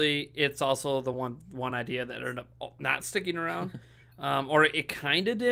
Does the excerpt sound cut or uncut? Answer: uncut